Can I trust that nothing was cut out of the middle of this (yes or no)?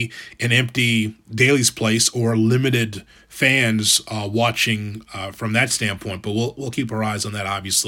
yes